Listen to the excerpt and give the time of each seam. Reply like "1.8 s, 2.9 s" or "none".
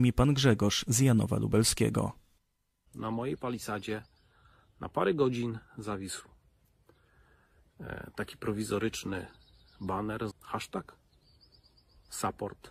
10.3 s